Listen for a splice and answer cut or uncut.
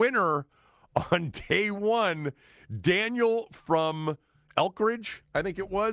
uncut